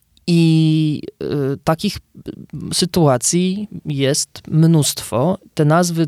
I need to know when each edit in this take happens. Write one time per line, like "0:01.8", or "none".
none